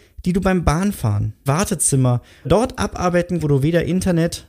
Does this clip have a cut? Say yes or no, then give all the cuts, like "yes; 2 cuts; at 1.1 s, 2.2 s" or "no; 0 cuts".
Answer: yes; 3 cuts; at 1.5 s, 2.4 s, 3.4 s